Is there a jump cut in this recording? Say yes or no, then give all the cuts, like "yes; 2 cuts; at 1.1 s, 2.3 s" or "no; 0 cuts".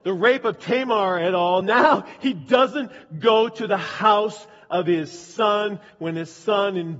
no; 0 cuts